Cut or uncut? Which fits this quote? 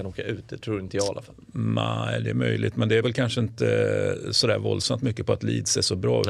cut